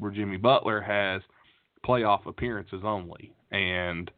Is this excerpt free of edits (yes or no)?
yes